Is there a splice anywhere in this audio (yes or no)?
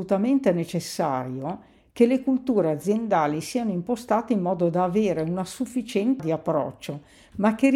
yes